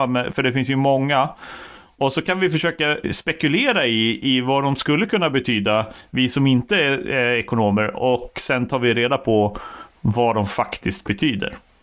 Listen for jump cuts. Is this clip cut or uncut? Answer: cut